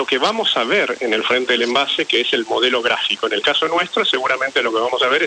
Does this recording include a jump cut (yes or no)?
no